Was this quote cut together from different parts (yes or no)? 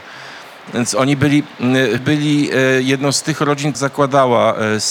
yes